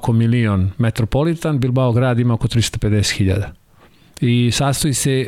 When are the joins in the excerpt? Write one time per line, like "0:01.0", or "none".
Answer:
none